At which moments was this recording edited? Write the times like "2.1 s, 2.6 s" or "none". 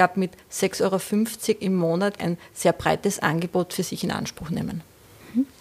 2.2 s